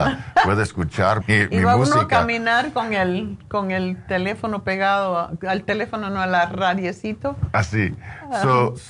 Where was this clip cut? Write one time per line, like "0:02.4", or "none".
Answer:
0:01.2